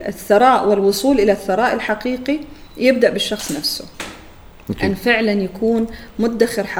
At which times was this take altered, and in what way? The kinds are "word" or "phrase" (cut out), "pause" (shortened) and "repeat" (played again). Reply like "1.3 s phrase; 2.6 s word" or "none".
none